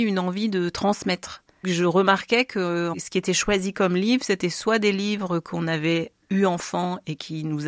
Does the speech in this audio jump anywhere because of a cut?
no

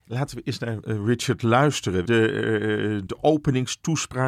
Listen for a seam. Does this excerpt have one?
yes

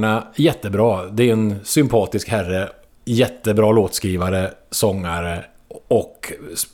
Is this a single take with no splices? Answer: yes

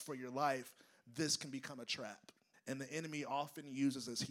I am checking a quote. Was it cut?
yes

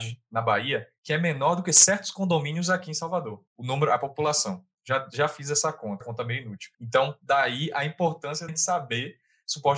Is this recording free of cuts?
no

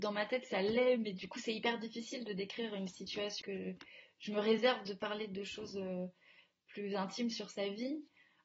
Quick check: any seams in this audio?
yes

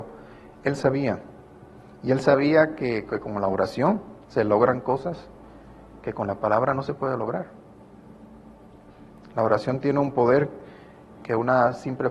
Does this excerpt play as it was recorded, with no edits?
no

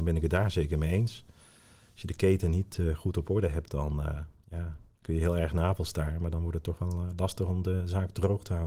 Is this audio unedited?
yes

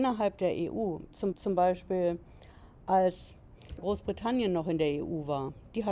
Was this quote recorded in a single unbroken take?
no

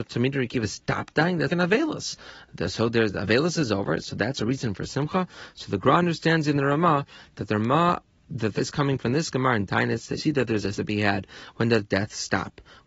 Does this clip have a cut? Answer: yes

